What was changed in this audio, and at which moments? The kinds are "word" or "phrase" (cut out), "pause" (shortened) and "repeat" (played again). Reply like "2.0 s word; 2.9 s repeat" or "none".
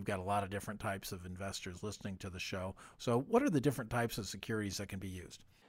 none